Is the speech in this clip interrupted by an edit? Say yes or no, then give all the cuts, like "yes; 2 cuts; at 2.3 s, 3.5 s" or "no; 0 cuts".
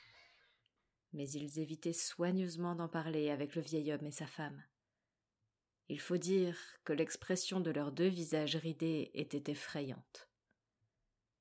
no; 0 cuts